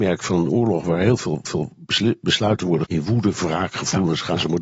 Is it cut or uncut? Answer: cut